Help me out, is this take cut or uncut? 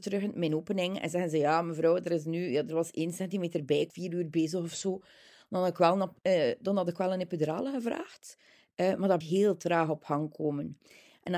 cut